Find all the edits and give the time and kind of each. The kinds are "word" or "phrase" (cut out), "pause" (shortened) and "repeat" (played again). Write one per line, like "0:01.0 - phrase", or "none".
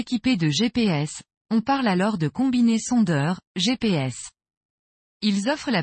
none